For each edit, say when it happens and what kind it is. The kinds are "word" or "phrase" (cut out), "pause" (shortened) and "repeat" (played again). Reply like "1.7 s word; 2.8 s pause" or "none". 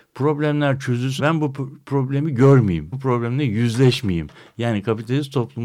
1.2 s word; 2.9 s word